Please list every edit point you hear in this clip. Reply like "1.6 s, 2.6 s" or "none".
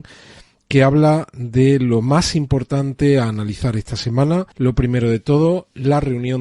4.5 s